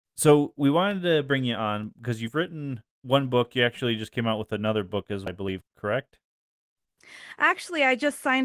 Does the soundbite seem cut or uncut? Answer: cut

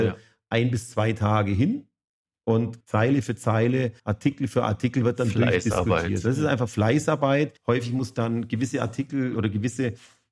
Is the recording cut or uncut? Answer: cut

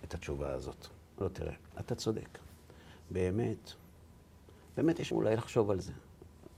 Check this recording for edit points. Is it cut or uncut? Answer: cut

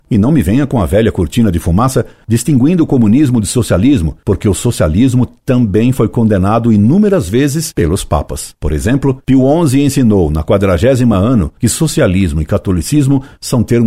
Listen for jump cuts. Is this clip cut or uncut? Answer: uncut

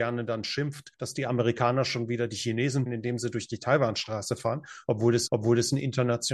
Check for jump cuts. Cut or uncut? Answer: cut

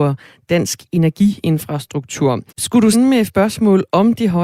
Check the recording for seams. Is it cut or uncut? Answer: cut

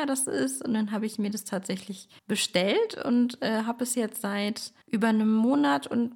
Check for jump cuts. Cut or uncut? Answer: cut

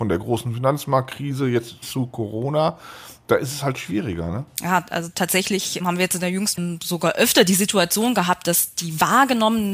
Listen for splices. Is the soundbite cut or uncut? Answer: cut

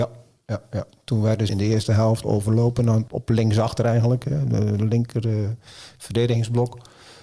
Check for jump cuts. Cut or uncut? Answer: cut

